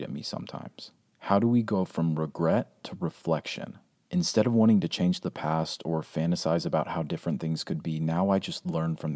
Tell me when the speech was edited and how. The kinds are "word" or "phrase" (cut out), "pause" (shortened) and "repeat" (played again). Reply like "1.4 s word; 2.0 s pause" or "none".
none